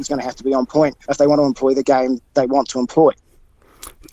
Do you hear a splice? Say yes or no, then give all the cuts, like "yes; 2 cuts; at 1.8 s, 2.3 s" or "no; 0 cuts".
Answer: yes; 1 cut; at 1.0 s